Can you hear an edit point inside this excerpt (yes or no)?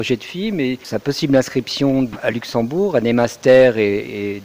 no